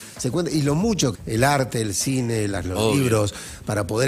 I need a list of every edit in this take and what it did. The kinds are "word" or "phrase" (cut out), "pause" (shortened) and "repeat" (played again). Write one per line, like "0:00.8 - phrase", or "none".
0:01.1 - word
0:02.6 - word